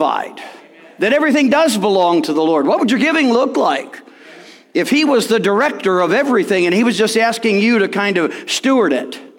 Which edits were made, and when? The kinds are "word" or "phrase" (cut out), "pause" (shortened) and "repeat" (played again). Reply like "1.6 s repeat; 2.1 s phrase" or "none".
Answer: none